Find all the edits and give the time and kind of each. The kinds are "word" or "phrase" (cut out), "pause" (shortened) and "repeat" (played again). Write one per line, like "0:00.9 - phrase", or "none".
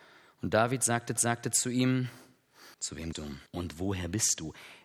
0:01.2 - repeat
0:02.7 - pause
0:03.1 - word
0:03.5 - pause